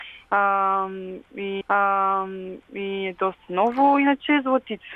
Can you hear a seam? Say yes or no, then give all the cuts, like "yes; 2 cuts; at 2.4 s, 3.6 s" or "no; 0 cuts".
yes; 1 cut; at 1.6 s